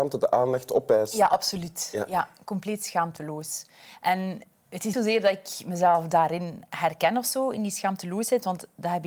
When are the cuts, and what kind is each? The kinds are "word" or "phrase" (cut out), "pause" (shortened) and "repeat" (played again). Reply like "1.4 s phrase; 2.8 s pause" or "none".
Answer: 4.9 s word